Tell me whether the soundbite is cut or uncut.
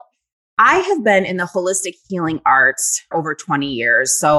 cut